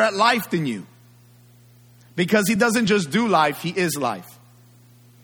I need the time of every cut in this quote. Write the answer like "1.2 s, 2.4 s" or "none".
none